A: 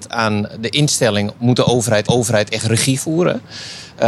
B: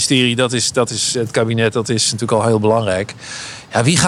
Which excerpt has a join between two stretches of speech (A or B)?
A